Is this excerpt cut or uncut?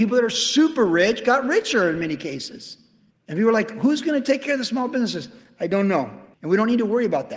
cut